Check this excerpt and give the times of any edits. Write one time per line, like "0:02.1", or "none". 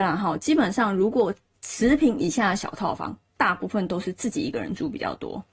none

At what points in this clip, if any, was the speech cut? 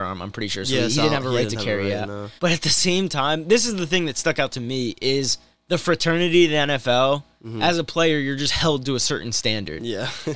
0:02.4
0:05.5

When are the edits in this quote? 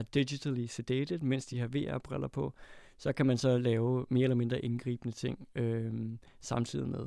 0:01.5

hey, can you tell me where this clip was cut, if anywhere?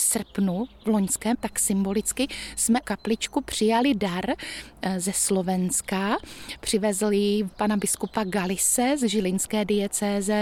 0:01.3
0:02.8
0:07.5

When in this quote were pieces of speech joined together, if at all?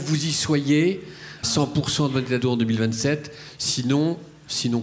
0:01.4
0:02.4

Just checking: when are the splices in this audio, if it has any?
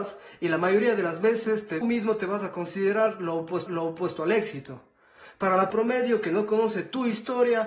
0:01.8
0:03.7
0:05.7

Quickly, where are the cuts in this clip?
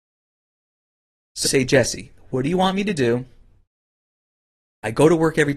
0:01.4

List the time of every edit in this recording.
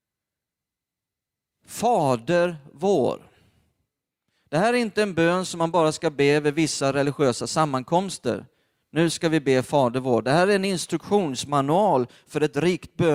none

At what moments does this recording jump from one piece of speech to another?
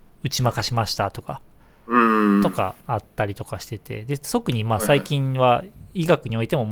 0:02.8

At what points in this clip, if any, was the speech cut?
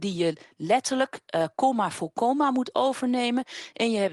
none

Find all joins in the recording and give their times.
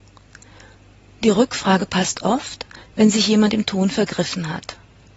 none

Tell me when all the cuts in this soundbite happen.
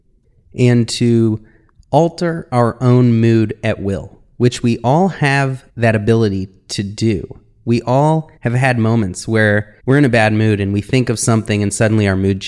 0:05.7
0:08.4
0:09.8

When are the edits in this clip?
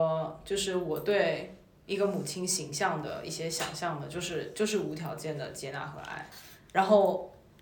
none

